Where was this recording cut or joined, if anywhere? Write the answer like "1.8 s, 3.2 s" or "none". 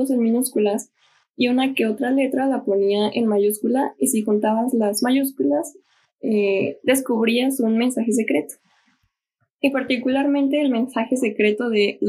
none